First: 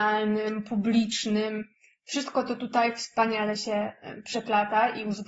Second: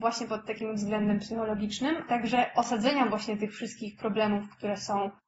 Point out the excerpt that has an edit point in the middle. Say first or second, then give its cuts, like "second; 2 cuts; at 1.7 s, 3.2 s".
second; 1 cut; at 2.1 s